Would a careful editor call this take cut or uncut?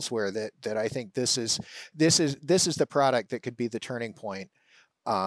uncut